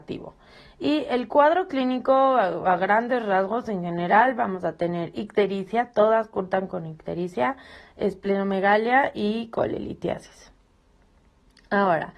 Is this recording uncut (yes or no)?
yes